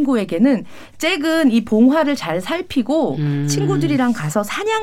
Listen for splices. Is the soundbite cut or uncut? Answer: uncut